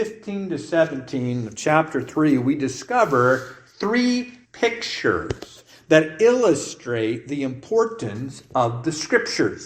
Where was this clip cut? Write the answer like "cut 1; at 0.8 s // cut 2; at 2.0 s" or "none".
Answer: cut 1; at 4.4 s